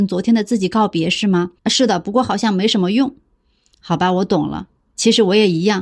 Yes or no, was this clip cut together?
yes